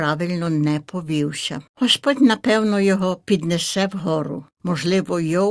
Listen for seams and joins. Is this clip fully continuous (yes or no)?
no